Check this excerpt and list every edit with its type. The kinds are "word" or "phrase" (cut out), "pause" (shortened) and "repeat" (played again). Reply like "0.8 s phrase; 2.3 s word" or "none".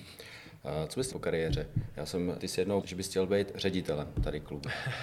1.1 s word; 2.4 s phrase; 2.8 s word